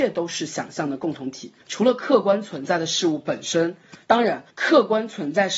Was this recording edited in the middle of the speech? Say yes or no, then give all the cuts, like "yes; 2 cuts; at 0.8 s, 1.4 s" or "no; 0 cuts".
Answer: yes; 2 cuts; at 1.6 s, 4.5 s